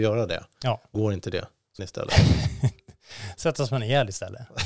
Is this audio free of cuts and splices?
no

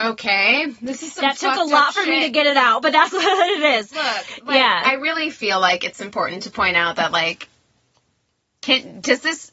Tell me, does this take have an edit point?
no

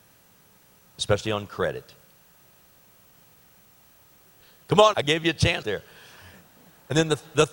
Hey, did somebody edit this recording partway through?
yes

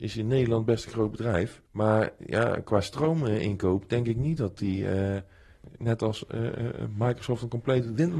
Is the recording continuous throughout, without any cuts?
no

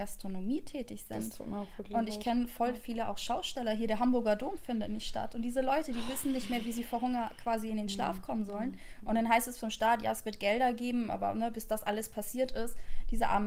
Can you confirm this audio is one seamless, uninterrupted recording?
yes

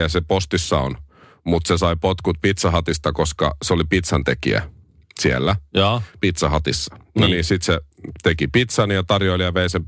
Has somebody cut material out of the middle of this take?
no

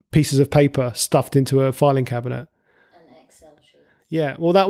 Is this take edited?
no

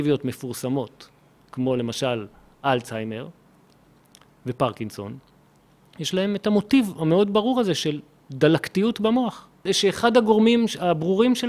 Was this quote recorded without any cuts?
yes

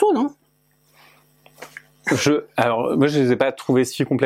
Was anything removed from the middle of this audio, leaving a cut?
no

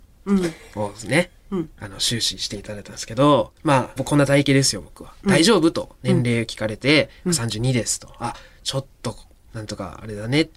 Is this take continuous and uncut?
no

